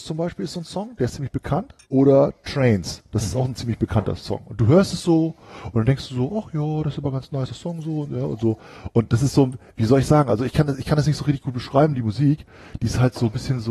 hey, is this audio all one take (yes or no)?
no